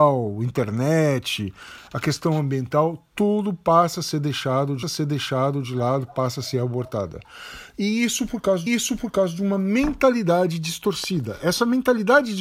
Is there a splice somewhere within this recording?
yes; 2 cuts; at 4.8 s, 8.7 s

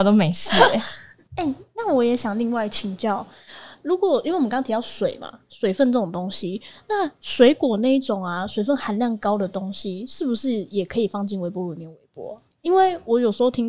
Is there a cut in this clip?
no; 0 cuts

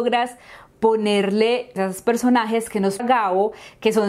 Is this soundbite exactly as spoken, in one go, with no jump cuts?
no; 2 cuts; at 1.8 s, 3.0 s

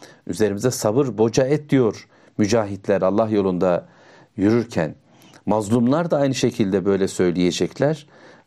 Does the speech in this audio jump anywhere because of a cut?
no; 0 cuts

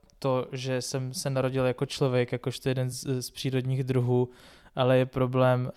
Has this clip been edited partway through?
no; 0 cuts

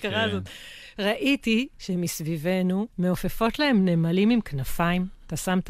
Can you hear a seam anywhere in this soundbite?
yes; 1 cut; at 2.9 s

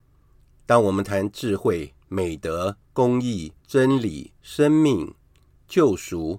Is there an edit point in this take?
yes; 4 cuts; at 2.0 s, 2.8 s, 3.6 s, 4.4 s

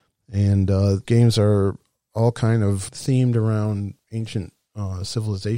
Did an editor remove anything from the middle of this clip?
yes; 3 cuts; at 1.0 s, 2.9 s, 4.0 s

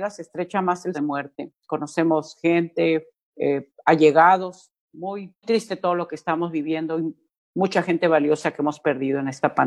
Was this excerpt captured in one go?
no; 3 cuts; at 0.9 s, 3.3 s, 5.4 s

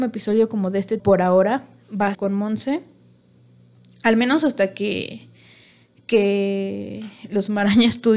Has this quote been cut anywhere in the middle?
yes; 2 cuts; at 1.0 s, 2.1 s

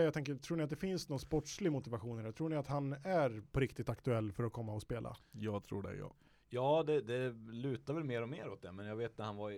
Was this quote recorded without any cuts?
yes; 0 cuts

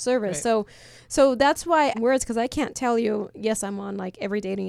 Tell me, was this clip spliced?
yes; 1 cut; at 1.9 s

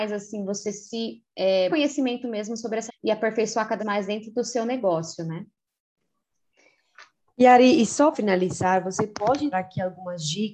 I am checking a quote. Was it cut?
yes; 5 cuts; at 1.7 s, 2.9 s, 3.8 s, 8.1 s, 9.5 s

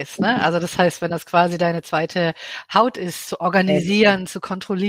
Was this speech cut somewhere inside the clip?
no; 0 cuts

